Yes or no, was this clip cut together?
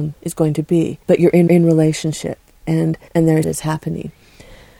yes